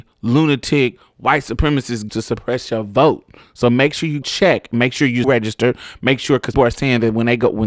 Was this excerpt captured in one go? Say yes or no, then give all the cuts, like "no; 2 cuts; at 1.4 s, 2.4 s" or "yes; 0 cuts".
no; 4 cuts; at 2.1 s, 4.2 s, 5.2 s, 6.5 s